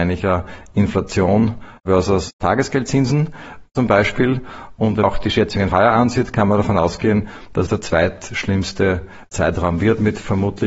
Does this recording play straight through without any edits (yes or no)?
no